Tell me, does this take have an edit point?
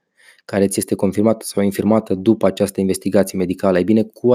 no; 0 cuts

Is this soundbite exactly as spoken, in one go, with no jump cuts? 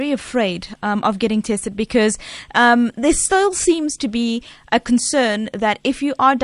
yes; 0 cuts

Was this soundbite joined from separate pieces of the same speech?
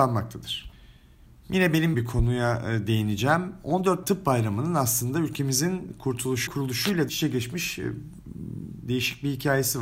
yes; 4 cuts; at 1.9 s, 4.0 s, 6.5 s, 7.1 s

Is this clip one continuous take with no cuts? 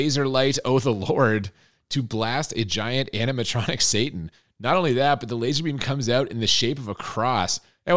yes; 0 cuts

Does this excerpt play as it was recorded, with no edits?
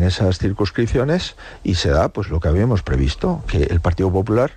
yes; 0 cuts

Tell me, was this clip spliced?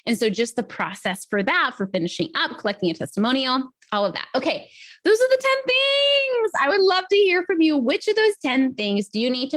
no; 0 cuts

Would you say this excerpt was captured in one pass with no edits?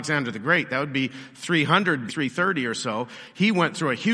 no; 1 cut; at 2.1 s

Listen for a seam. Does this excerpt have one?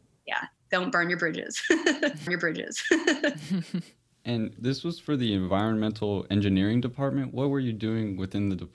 yes; 2 cuts; at 2.3 s, 4.6 s

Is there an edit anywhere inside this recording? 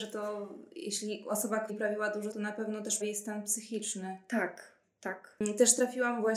yes; 3 cuts; at 1.7 s, 2.3 s, 3.0 s

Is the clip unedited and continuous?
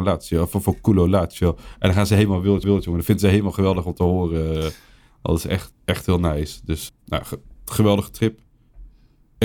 no; 3 cuts; at 2.6 s, 5.7 s, 6.9 s

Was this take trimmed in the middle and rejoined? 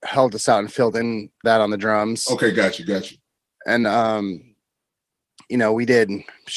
yes; 2 cuts; at 1.4 s, 3.8 s

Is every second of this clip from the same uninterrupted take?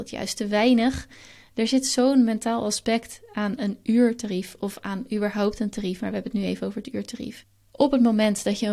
yes; 0 cuts

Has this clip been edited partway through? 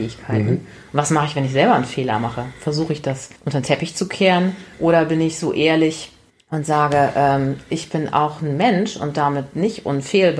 yes; 3 cuts; at 3.4 s, 4.7 s, 6.3 s

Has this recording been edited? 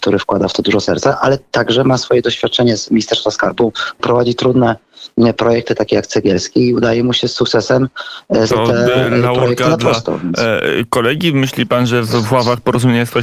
yes; 2 cuts; at 4.0 s, 8.5 s

